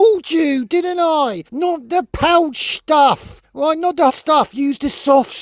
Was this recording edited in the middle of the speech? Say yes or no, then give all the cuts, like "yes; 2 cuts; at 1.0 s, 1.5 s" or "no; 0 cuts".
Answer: yes; 3 cuts; at 1.5 s, 3.4 s, 4.1 s